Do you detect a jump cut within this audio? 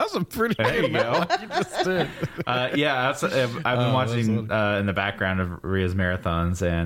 no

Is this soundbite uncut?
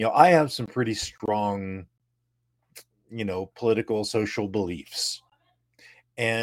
yes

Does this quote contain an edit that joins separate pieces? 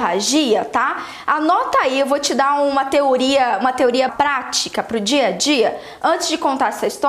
yes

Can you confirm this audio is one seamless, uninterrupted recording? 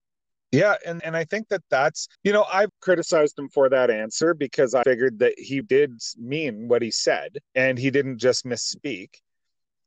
no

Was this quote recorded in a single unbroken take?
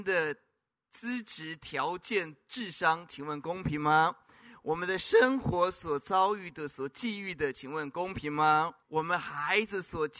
no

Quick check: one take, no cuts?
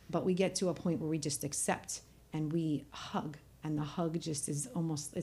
yes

